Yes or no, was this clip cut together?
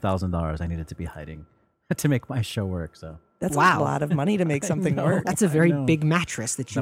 no